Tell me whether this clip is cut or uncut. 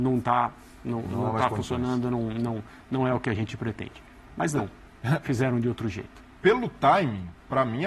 cut